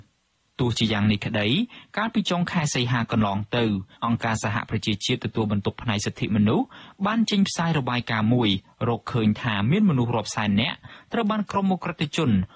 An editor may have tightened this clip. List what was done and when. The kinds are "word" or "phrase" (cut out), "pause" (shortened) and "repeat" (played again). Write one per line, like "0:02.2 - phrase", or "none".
0:03.9 - pause